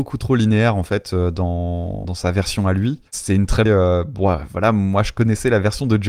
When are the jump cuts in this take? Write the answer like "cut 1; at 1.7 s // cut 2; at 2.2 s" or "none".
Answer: cut 1; at 2.0 s // cut 2; at 3.1 s // cut 3; at 3.7 s